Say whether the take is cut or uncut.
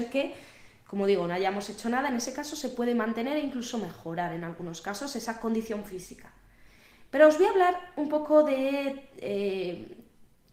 uncut